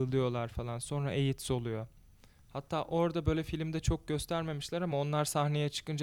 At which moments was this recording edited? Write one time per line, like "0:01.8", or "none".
none